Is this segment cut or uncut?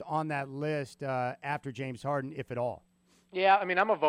uncut